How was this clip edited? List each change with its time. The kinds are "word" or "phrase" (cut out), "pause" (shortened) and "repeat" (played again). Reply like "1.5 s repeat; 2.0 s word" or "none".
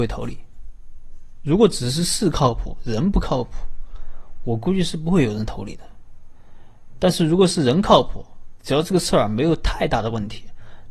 none